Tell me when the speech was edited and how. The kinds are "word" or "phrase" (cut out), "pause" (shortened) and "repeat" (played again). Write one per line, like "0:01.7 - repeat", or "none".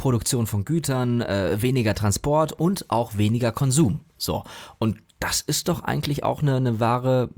none